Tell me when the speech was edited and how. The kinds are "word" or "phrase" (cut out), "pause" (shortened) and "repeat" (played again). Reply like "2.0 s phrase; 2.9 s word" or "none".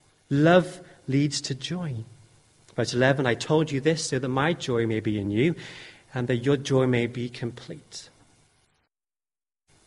none